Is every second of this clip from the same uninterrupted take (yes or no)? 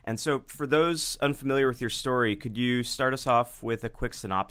yes